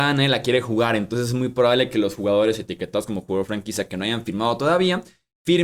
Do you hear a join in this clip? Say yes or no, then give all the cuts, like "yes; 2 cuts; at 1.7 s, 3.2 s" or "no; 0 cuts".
no; 0 cuts